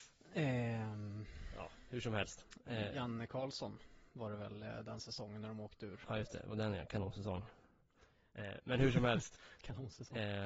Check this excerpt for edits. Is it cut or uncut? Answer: uncut